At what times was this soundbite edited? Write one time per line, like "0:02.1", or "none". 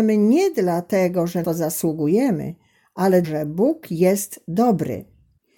0:01.4
0:03.2